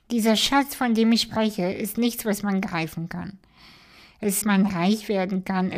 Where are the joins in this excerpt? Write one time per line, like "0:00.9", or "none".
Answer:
0:04.4